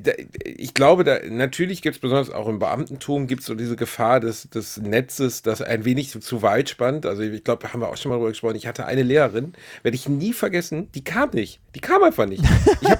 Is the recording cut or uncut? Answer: uncut